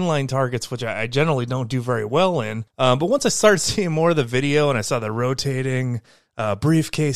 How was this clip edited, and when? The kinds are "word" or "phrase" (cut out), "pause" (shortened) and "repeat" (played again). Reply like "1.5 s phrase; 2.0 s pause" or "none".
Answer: 2.7 s pause